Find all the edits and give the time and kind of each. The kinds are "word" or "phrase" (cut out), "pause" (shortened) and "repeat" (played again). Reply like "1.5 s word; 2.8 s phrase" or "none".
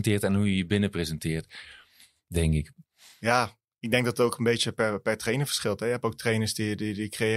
none